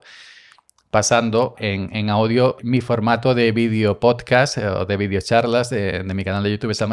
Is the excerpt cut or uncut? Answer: cut